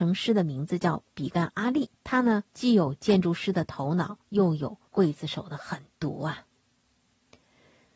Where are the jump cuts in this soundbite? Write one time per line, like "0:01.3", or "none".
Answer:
0:01.9
0:02.5
0:04.2
0:04.9